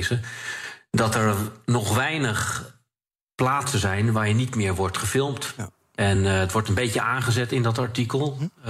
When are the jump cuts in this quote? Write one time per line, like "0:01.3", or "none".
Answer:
none

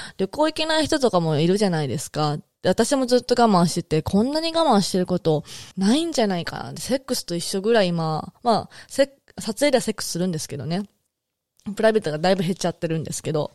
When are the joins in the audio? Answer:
0:05.7

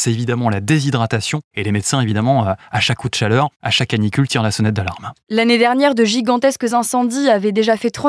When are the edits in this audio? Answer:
none

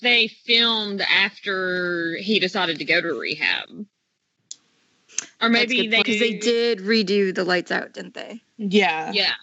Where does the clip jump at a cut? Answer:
0:06.0

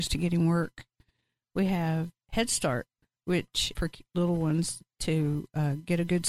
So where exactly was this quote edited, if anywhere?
0:02.2
0:03.7

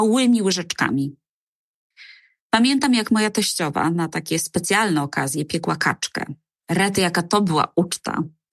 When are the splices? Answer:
none

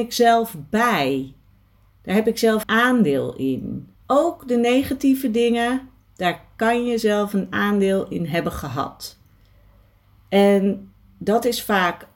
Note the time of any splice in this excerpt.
0:02.6
0:04.0

